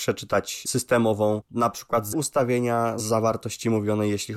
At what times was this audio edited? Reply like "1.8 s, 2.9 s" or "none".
2.1 s

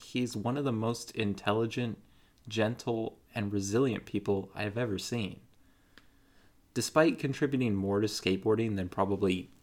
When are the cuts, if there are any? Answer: none

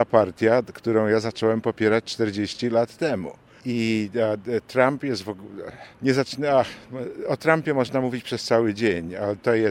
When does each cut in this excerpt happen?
5.9 s

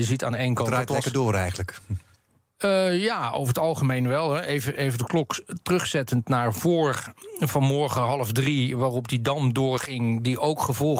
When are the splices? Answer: none

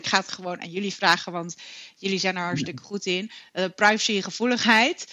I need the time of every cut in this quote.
none

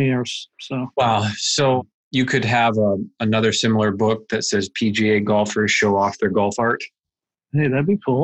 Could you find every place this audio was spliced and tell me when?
none

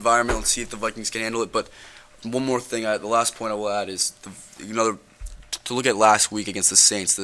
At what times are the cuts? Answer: none

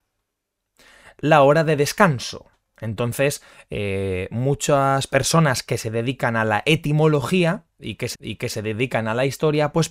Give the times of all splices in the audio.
2.6 s, 8.1 s

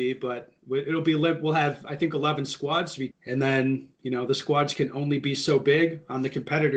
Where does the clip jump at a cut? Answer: 3.1 s, 3.9 s

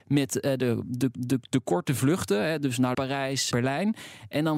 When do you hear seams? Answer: 1.2 s, 2.9 s, 3.5 s

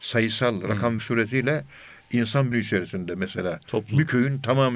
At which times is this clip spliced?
1.0 s, 2.5 s

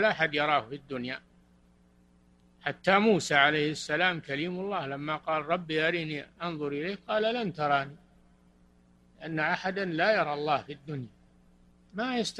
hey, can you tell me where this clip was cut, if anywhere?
none

